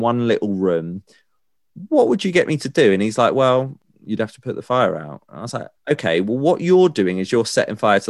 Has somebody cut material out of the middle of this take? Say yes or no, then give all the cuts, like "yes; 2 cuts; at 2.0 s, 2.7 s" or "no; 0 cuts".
yes; 1 cut; at 5.8 s